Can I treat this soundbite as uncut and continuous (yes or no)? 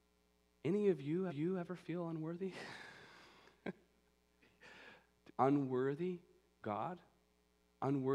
no